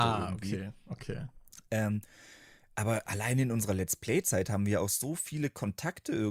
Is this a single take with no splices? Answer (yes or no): yes